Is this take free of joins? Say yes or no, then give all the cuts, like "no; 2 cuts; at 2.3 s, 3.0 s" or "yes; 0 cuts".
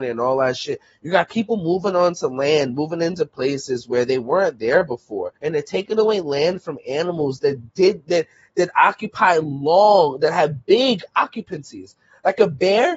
no; 1 cut; at 5.4 s